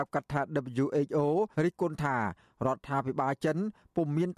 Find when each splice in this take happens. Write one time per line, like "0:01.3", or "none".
0:01.5